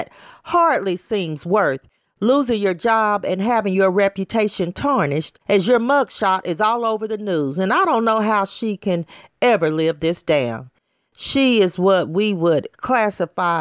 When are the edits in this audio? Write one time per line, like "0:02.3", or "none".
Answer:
0:05.4